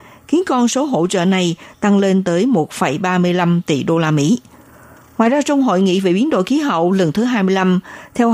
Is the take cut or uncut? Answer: uncut